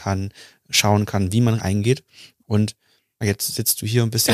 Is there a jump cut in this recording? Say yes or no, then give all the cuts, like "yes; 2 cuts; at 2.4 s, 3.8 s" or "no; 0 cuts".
yes; 2 cuts; at 1.6 s, 3.2 s